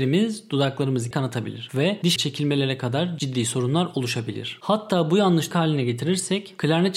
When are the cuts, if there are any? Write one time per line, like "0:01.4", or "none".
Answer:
0:01.1
0:02.2
0:05.5